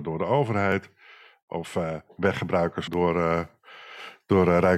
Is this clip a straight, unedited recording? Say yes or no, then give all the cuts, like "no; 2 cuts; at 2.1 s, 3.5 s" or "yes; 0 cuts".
yes; 0 cuts